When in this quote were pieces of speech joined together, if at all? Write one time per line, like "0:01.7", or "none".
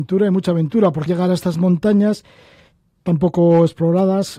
0:01.1